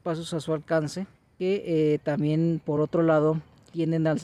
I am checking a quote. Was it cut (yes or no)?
no